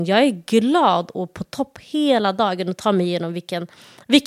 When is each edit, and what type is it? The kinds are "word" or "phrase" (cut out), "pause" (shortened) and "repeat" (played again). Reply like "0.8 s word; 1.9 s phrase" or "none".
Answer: none